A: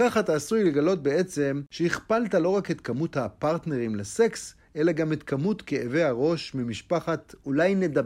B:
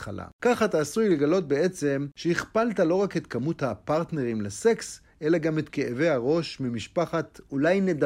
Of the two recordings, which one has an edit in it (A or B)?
B